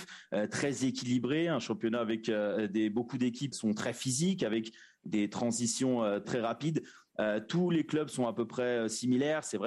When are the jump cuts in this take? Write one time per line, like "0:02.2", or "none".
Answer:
0:03.5
0:06.2